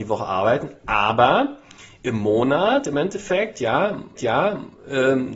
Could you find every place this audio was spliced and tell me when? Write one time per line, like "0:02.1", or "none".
0:04.2